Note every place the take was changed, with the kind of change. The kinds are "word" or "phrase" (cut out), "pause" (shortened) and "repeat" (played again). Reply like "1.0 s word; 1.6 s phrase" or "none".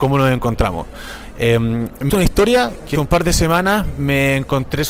2.1 s word; 2.9 s word